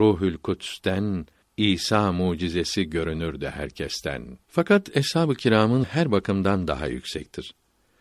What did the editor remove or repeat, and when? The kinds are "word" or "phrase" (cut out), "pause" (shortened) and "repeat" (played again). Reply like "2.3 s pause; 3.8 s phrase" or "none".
1.4 s pause; 4.4 s pause; 5.8 s word